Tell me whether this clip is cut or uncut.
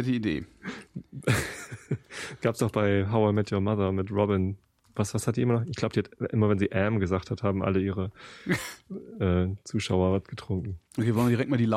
uncut